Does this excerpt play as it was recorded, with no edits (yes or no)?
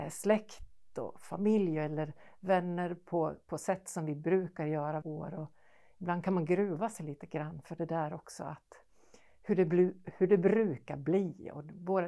no